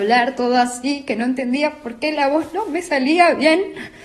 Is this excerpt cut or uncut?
uncut